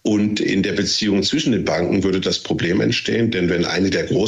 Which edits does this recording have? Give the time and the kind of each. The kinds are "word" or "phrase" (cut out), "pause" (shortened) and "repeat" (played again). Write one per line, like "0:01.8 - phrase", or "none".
none

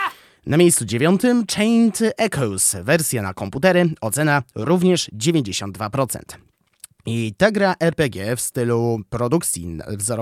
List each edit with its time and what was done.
none

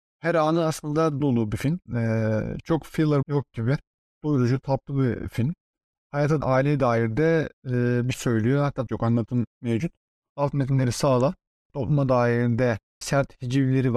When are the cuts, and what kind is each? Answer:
0:01.2 - word
0:01.9 - pause
0:03.2 - word
0:06.4 - phrase
0:07.6 - pause
0:08.1 - word
0:08.9 - phrase
0:13.0 - word

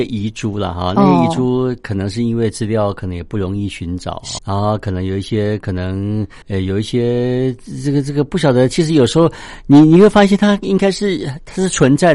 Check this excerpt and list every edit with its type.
0:04.4 - word
0:06.4 - pause

